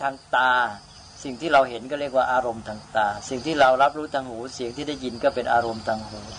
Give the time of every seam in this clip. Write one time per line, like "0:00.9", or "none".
none